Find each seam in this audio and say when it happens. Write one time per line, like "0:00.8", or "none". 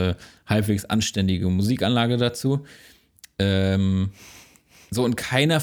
none